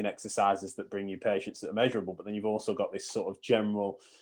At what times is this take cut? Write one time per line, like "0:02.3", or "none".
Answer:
none